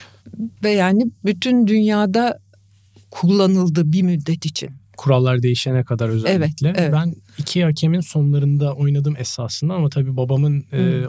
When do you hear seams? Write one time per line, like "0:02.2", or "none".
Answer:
none